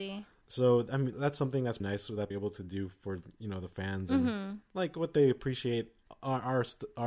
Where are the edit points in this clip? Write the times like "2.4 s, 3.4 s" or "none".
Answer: 1.1 s, 1.8 s, 2.3 s